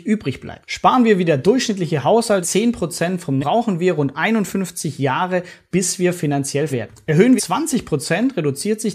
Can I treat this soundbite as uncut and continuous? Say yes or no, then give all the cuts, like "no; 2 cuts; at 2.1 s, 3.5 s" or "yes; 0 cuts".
no; 4 cuts; at 2.4 s, 3.4 s, 6.7 s, 7.4 s